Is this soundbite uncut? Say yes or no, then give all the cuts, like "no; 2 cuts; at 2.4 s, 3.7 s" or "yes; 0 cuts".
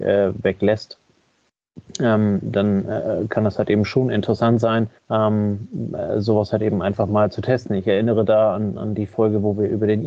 no; 1 cut; at 5.0 s